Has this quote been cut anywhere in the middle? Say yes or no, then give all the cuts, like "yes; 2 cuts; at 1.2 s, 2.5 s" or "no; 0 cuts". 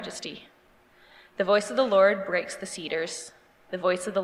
no; 0 cuts